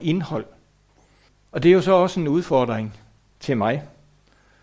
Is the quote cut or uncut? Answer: cut